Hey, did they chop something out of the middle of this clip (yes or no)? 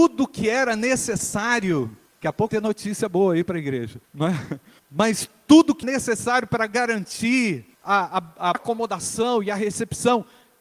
yes